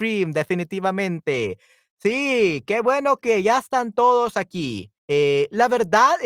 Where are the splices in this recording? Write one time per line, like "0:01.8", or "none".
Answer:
0:05.0